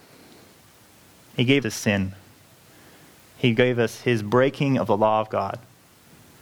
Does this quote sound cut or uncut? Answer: cut